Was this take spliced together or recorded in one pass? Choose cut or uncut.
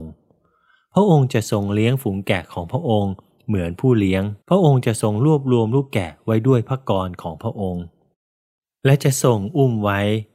cut